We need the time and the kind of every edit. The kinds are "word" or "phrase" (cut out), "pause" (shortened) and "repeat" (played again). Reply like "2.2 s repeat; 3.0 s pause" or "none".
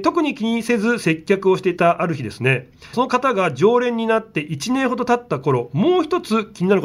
2.9 s phrase